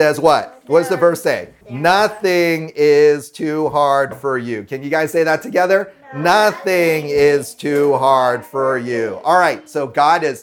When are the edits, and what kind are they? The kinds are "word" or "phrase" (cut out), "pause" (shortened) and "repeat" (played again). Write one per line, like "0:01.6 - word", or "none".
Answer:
0:01.6 - pause